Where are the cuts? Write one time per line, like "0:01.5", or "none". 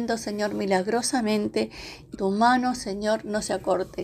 0:02.1